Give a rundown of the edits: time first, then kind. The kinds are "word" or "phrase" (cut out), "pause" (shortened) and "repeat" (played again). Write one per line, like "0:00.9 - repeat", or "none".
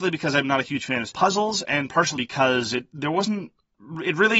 0:01.1 - word
0:02.2 - word